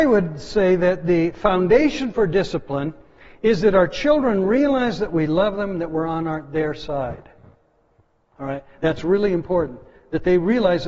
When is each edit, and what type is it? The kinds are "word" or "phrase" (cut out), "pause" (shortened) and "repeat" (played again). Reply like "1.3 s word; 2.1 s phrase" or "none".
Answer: none